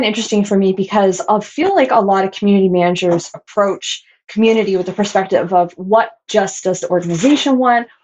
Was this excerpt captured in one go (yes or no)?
yes